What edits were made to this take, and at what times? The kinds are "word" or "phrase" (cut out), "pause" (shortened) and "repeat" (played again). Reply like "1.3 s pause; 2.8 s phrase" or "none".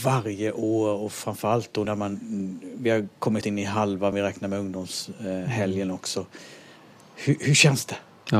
1.9 s word; 3.4 s word; 4.1 s phrase